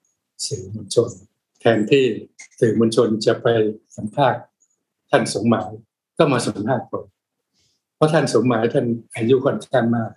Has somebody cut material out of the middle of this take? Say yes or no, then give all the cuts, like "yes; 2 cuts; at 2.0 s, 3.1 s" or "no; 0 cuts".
yes; 1 cut; at 3.8 s